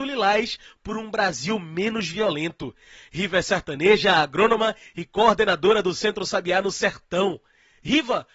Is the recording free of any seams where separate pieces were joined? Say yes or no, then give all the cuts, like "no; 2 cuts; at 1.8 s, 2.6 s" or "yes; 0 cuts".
yes; 0 cuts